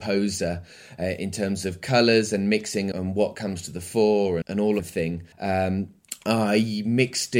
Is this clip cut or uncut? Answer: cut